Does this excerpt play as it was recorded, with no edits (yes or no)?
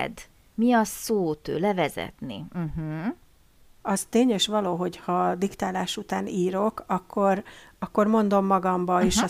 yes